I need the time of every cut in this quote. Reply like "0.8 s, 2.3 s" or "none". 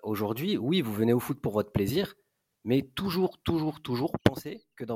none